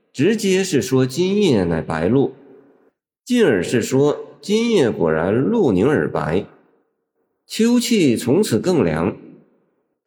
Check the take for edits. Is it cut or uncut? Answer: uncut